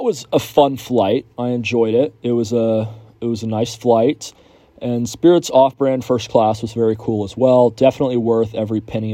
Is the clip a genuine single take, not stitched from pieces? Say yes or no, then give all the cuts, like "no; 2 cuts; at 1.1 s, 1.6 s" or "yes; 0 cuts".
yes; 0 cuts